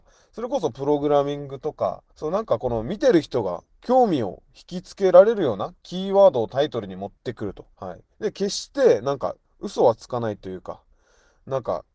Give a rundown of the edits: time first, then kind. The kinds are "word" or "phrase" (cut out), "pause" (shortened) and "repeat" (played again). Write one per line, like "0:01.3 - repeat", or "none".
0:02.1 - pause
0:07.7 - pause